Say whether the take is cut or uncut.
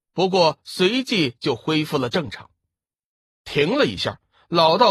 uncut